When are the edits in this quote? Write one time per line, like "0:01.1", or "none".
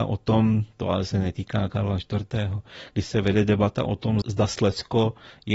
0:04.2